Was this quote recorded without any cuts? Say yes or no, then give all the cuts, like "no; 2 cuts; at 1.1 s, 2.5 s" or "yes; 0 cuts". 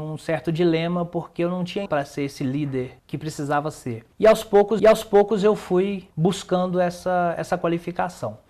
no; 5 cuts; at 1.9 s, 3.0 s, 4.1 s, 4.8 s, 6.1 s